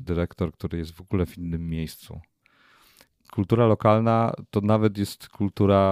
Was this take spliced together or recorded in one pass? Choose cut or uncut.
uncut